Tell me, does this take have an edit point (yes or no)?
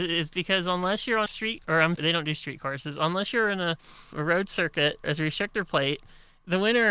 yes